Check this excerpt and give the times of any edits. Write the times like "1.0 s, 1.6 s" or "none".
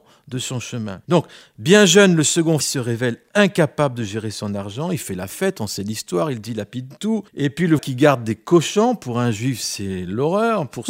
1.0 s, 2.6 s, 7.3 s, 7.8 s